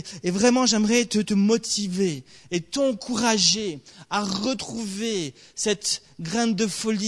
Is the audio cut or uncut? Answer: uncut